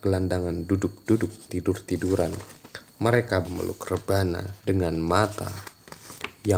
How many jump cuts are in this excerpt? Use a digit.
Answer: 3